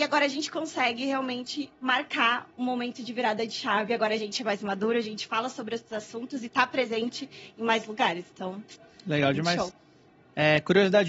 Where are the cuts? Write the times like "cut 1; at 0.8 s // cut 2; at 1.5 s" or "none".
none